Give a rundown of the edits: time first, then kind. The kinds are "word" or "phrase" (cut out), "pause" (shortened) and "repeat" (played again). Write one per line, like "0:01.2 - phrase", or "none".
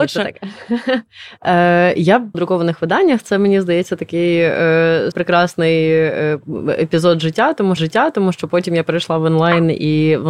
0:02.3 - phrase
0:05.1 - word
0:07.8 - repeat

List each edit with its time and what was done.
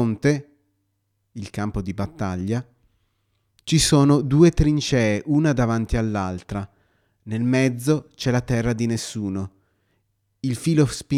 none

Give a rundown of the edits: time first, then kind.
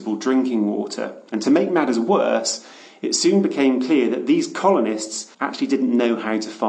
0:05.3 - pause

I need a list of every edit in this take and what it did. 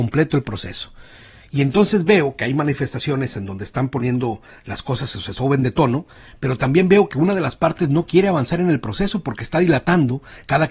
none

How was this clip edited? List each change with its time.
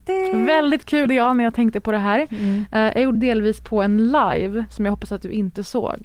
0:01.1 - word
0:03.1 - word

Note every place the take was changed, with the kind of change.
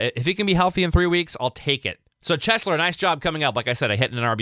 0:02.1 - pause

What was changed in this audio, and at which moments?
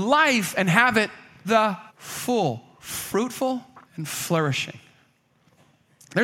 0:01.4 - word
0:01.9 - pause
0:03.8 - pause

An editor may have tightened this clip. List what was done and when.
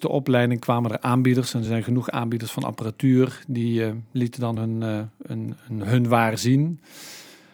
none

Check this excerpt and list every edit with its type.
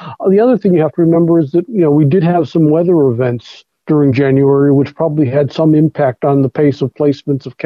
none

